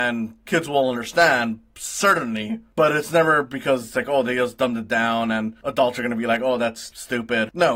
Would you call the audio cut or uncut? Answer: uncut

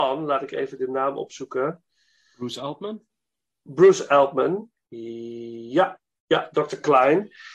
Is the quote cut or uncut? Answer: uncut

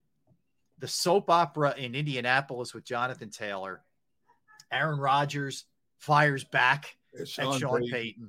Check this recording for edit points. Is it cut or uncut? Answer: uncut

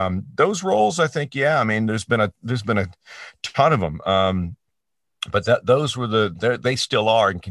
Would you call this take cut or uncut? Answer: uncut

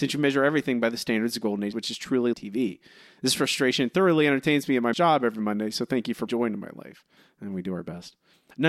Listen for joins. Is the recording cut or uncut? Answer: cut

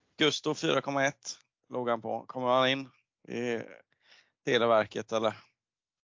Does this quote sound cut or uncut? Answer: uncut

